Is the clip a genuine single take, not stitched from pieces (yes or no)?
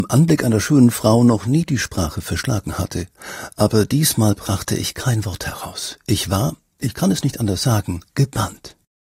no